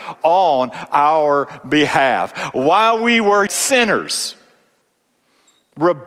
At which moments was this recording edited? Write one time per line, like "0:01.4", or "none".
0:03.5